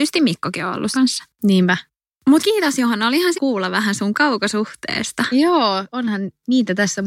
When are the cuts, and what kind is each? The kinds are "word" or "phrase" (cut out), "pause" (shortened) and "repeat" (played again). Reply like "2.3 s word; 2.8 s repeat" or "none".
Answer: 0.9 s phrase; 2.4 s word; 3.3 s word; 4.1 s word